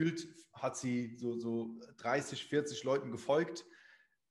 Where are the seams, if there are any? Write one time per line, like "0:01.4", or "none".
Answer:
none